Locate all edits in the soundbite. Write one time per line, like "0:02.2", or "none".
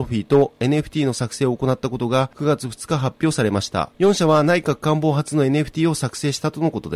none

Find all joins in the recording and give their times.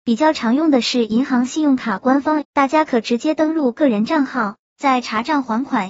0:02.4

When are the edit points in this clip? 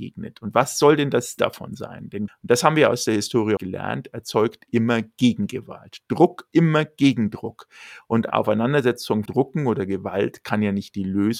0:01.4
0:02.3
0:03.6
0:06.5
0:08.3
0:09.3

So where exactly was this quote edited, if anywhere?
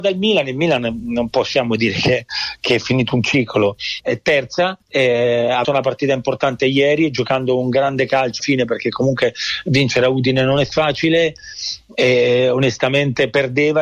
0:04.0
0:04.8
0:05.6
0:08.4

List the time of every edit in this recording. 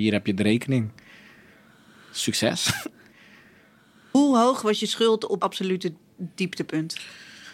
0:05.4

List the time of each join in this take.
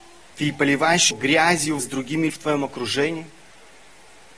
0:01.1
0:01.8
0:02.3

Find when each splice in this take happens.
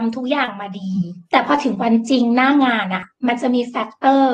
0:01.2

